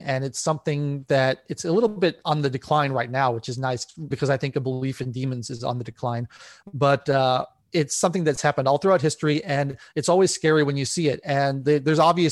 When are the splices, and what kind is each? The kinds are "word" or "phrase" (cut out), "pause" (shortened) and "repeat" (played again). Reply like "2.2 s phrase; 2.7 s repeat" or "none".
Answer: 4.1 s word